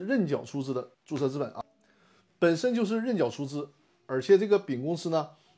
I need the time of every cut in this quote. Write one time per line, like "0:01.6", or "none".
0:00.9